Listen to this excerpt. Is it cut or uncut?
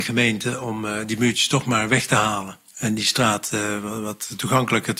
cut